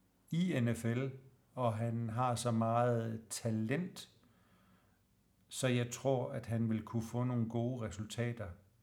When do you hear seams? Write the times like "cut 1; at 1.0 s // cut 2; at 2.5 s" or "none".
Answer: none